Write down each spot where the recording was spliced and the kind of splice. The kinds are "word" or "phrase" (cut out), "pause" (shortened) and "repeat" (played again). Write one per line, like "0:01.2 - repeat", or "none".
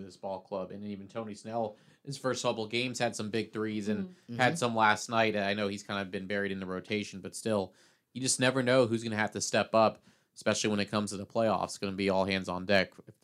none